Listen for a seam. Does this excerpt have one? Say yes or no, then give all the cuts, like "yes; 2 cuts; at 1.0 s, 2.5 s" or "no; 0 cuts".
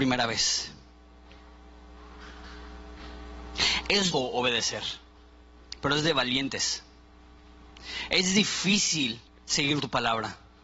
yes; 2 cuts; at 4.1 s, 9.3 s